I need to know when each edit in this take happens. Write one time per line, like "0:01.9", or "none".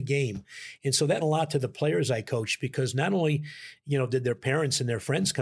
0:01.2